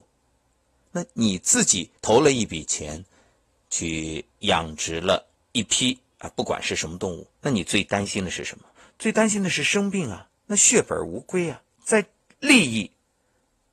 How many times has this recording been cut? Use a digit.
8